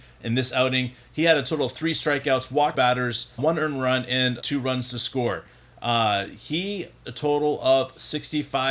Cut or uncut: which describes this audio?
cut